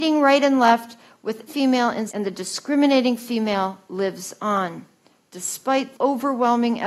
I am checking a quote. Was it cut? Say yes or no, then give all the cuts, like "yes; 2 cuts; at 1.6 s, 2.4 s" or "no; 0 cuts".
yes; 3 cuts; at 1.5 s, 2.1 s, 5.9 s